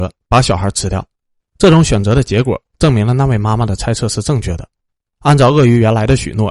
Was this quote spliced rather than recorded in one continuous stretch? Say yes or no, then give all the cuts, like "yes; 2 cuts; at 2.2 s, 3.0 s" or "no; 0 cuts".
no; 0 cuts